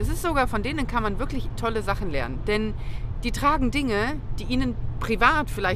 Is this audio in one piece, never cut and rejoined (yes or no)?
no